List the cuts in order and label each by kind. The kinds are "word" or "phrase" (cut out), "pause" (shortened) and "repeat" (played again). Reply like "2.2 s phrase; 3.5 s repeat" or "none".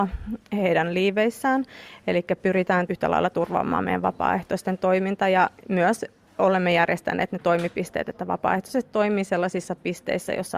2.9 s word; 5.6 s pause

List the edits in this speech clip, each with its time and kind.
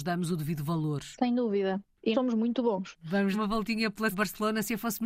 2.1 s word; 3.3 s word; 4.1 s word

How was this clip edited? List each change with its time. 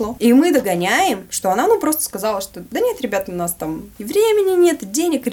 none

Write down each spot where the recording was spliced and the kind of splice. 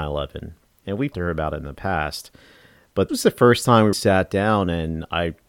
1.1 s word; 3.1 s word; 3.9 s word

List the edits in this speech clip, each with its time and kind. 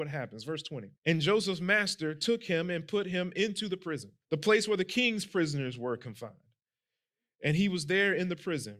1.0 s pause; 4.2 s pause

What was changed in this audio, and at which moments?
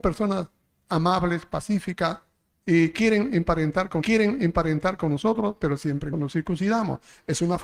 4.0 s repeat; 6.1 s phrase

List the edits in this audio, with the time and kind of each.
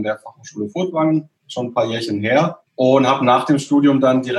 1.4 s pause; 2.7 s pause

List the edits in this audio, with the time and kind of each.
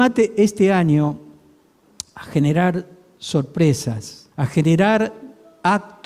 4.3 s pause

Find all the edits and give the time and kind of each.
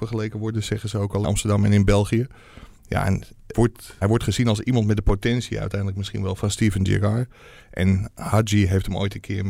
1.2 s word; 3.5 s word; 4.0 s word; 6.4 s word

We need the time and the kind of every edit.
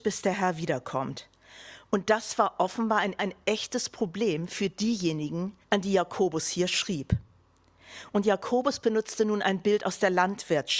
3.2 s repeat; 5.6 s pause

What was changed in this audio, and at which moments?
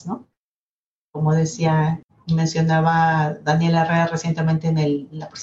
none

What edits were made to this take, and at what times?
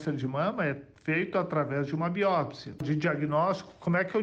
none

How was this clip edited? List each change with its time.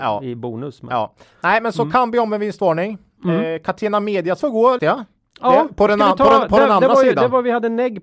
4.4 s word; 4.8 s word

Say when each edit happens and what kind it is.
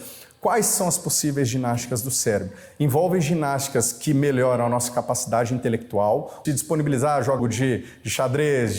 6.4 s phrase; 7.4 s phrase

